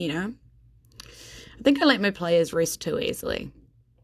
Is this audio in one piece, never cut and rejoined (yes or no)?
yes